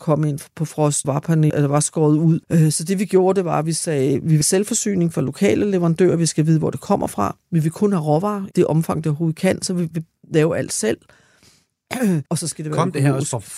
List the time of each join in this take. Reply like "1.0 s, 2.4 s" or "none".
1.0 s, 1.5 s, 2.4 s, 4.4 s, 8.5 s, 12.3 s